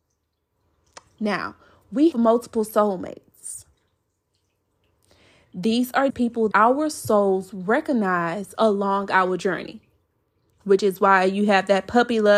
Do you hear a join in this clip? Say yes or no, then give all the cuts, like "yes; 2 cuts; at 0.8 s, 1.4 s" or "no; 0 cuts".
yes; 3 cuts; at 2.1 s, 6.1 s, 6.5 s